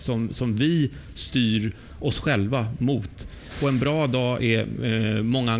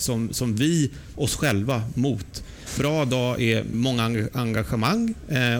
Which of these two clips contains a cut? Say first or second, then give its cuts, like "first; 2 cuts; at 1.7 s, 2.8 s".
second; 3 cuts; at 1.1 s, 2.8 s, 3.7 s